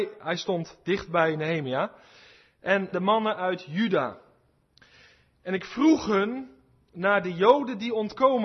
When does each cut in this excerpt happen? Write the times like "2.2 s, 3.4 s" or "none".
2.9 s